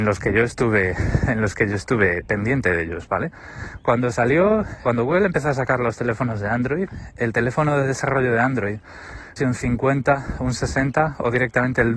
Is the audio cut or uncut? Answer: cut